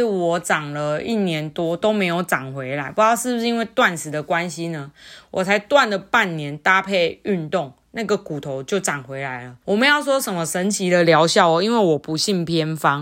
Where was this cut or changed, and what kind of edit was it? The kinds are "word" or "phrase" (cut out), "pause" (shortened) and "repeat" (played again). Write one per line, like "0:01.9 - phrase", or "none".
0:09.6 - pause